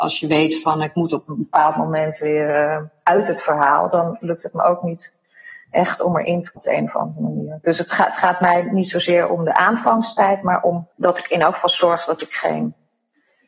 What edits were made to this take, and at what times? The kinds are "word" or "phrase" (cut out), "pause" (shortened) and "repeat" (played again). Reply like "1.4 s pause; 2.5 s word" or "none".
6.6 s word; 10.9 s pause

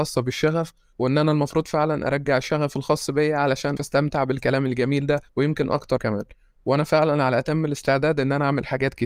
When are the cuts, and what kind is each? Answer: 3.8 s word; 5.3 s pause; 6.0 s word

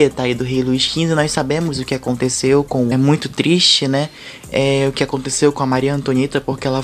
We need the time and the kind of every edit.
2.9 s phrase

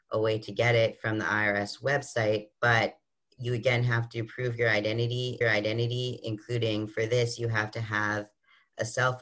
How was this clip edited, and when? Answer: 2.5 s pause; 5.4 s repeat

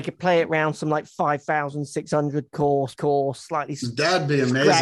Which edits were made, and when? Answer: 3.0 s word

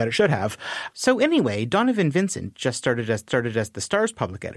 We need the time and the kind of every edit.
3.3 s repeat

